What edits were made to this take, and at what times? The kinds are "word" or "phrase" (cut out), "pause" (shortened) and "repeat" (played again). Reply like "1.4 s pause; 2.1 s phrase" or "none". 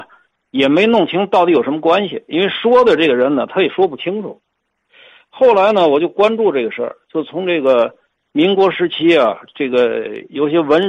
none